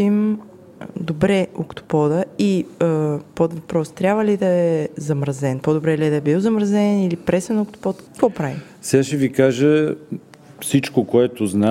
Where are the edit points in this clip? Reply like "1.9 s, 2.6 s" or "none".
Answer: 8.1 s

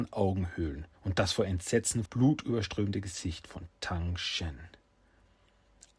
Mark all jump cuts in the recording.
1.0 s, 2.1 s

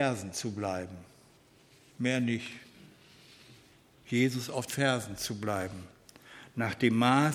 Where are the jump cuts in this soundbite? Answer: 4.7 s

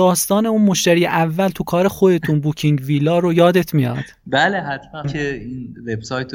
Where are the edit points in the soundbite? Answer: 5.0 s

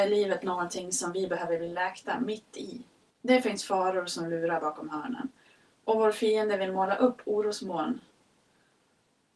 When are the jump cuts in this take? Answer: 3.1 s

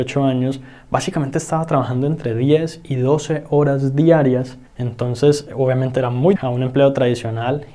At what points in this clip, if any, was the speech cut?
4.7 s, 6.4 s

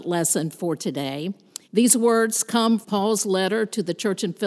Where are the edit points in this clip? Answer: 1.6 s, 2.8 s

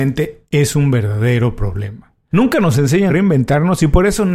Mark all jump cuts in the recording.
3.1 s

